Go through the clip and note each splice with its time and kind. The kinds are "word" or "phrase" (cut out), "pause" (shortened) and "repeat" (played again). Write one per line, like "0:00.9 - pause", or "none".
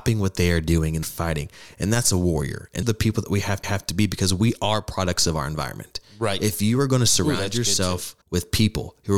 0:01.0 - phrase
0:02.8 - word
0:03.6 - repeat
0:08.2 - pause